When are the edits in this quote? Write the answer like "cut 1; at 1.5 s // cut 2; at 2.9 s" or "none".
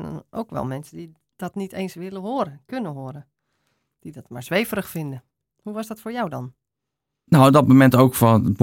none